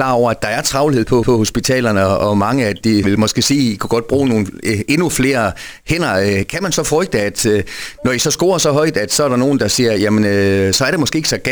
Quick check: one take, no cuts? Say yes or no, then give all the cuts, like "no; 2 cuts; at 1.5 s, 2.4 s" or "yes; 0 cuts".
no; 2 cuts; at 1.2 s, 3.0 s